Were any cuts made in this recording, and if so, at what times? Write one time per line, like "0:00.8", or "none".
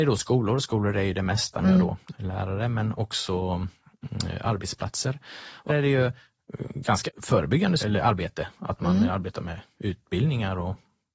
0:01.6
0:02.1
0:05.7
0:07.1
0:07.8